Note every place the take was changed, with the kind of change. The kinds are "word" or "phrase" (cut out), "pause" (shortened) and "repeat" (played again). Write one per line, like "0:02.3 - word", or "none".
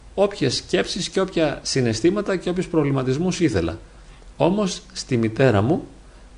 none